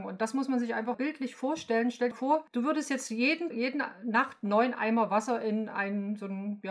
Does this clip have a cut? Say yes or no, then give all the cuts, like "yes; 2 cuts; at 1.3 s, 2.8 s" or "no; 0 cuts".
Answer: yes; 3 cuts; at 0.9 s, 2.1 s, 3.5 s